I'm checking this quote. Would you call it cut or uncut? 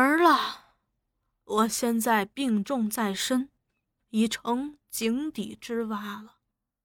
uncut